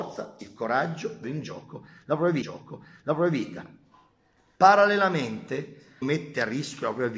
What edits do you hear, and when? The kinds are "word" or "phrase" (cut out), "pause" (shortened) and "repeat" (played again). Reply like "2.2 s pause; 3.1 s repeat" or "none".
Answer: 1.2 s word; 2.4 s repeat; 6.0 s word